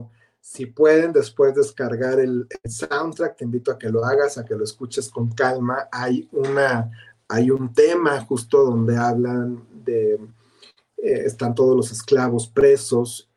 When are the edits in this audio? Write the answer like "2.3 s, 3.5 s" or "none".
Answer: none